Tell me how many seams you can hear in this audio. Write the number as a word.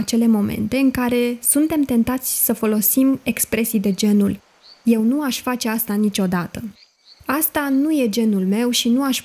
zero